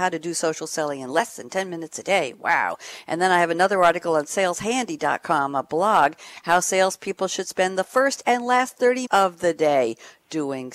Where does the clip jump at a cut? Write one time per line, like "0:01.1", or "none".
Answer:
0:09.1

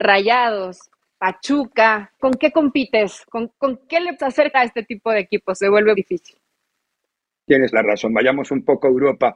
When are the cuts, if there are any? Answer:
0:02.2
0:03.9
0:04.2
0:04.5
0:05.9
0:07.7

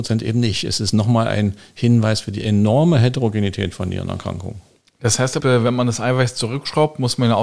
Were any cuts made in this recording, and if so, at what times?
0:05.4

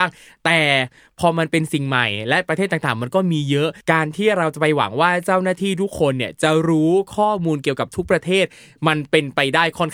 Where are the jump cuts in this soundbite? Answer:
0:03.8

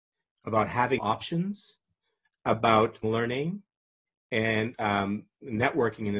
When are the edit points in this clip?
0:01.0
0:03.0
0:04.7

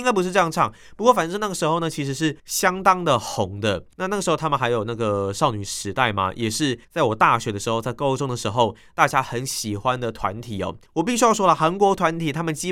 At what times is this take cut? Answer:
0:02.4
0:03.9
0:06.8
0:10.9

